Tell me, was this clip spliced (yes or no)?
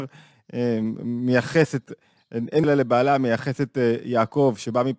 yes